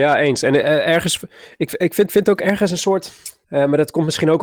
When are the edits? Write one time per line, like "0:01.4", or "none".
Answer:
0:02.1
0:03.4